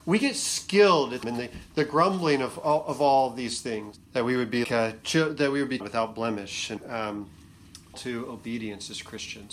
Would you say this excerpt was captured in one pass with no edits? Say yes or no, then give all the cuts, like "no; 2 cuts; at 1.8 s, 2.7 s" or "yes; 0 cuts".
no; 6 cuts; at 1.2 s, 4.0 s, 4.6 s, 5.8 s, 6.8 s, 7.9 s